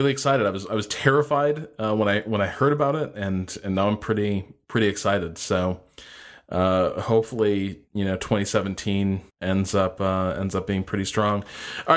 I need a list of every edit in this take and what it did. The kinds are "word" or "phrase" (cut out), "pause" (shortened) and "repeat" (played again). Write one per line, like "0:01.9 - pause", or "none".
0:07.9 - pause
0:09.3 - pause